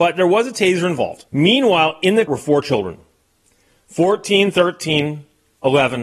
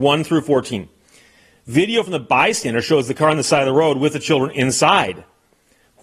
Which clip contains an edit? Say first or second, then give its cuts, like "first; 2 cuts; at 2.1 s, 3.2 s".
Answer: first; 2 cuts; at 1.3 s, 2.3 s